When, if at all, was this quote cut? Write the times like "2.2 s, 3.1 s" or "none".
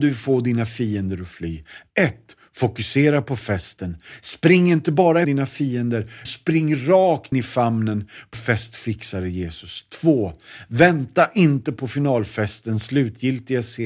5.2 s, 6.3 s, 7.3 s, 8.3 s